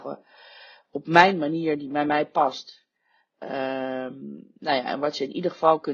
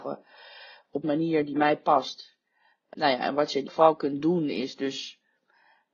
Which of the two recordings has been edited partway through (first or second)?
second